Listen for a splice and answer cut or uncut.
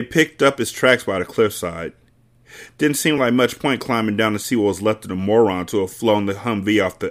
uncut